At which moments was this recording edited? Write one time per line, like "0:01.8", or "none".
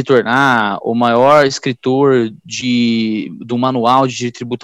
none